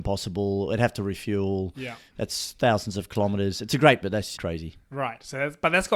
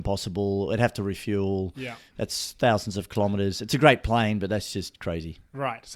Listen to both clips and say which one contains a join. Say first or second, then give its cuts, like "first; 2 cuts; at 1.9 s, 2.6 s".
first; 2 cuts; at 4.0 s, 4.4 s